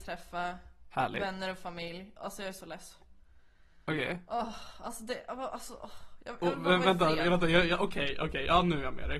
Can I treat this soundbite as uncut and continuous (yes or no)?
yes